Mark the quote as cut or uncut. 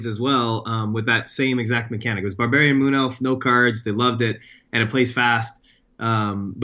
uncut